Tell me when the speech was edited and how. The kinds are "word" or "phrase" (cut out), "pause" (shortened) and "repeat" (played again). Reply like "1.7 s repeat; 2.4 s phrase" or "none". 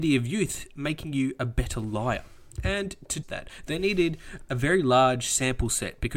3.2 s word